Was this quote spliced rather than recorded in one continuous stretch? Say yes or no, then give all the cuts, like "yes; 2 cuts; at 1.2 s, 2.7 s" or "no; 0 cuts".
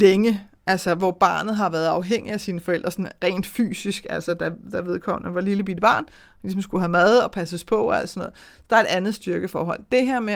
no; 0 cuts